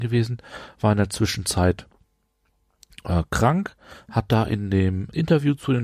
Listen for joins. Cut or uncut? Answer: uncut